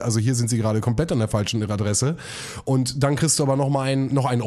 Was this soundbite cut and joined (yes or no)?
no